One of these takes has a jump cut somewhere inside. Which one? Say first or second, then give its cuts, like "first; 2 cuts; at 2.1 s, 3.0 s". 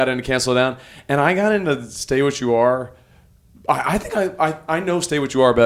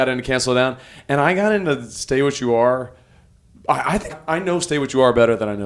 second; 1 cut; at 4.1 s